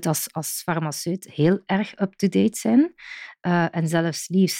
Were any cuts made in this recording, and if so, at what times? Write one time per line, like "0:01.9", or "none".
none